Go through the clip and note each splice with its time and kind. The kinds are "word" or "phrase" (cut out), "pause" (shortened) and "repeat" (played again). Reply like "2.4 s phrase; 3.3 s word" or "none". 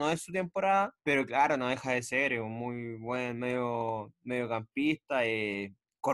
1.0 s pause